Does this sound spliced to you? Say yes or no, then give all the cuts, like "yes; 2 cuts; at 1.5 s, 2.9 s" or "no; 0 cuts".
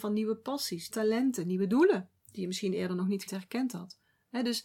yes; 3 cuts; at 0.9 s, 2.2 s, 3.3 s